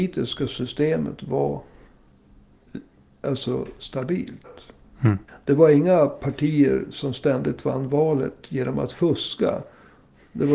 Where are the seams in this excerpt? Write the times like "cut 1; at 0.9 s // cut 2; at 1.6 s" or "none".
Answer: cut 1; at 5.3 s